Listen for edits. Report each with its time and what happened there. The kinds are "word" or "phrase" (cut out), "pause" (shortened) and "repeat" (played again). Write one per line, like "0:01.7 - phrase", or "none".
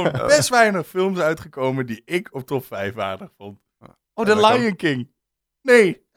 0:04.1 - pause